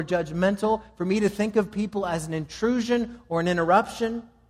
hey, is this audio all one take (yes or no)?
yes